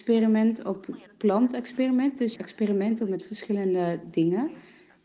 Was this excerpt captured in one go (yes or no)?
no